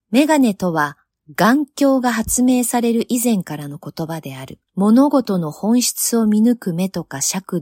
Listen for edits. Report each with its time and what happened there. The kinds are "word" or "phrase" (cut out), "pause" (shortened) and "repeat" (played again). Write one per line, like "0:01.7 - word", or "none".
0:04.7 - pause